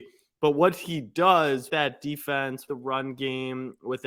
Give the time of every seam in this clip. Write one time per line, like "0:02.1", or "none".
0:01.7
0:02.7